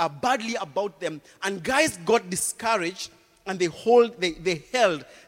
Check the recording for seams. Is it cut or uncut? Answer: uncut